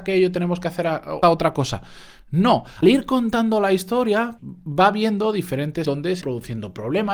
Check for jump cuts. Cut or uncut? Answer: cut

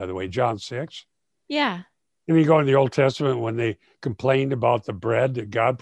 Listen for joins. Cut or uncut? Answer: uncut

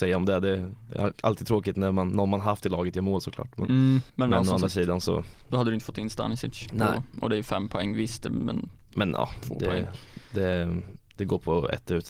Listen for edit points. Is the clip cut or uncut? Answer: cut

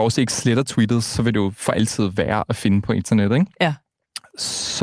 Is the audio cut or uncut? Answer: uncut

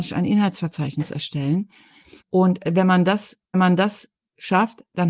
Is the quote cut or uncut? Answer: cut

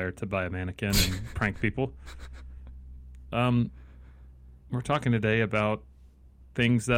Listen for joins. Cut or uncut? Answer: cut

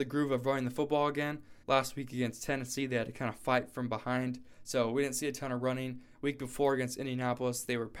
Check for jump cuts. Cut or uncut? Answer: cut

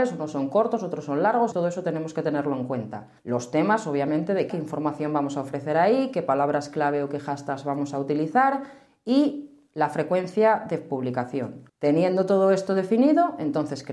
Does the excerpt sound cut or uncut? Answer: cut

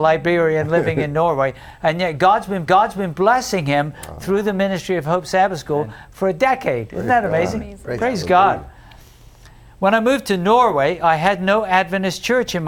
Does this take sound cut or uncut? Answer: cut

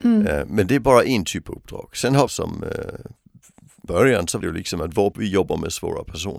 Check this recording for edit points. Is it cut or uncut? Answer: cut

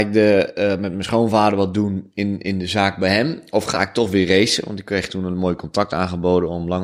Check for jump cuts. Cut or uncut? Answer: uncut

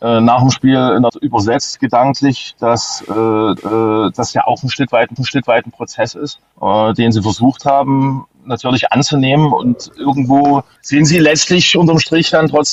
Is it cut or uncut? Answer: cut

